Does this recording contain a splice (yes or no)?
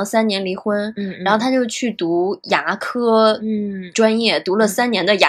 no